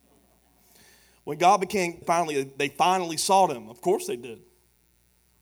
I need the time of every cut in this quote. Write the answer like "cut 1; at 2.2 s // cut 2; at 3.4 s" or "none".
cut 1; at 2.0 s